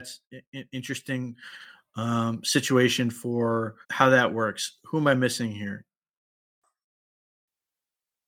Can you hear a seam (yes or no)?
yes